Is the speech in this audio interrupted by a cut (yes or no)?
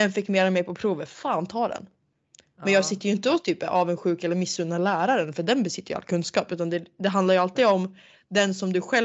no